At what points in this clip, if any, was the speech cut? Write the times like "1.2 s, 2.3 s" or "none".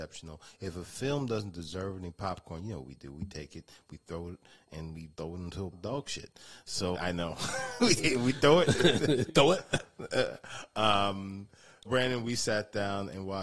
5.1 s, 5.7 s, 6.9 s, 8.0 s, 9.3 s, 11.9 s